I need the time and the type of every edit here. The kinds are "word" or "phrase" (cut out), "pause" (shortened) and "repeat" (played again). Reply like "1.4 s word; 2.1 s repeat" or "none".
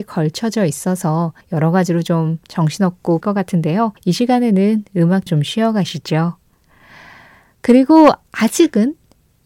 1.4 s pause; 3.2 s phrase; 4.0 s pause; 5.3 s word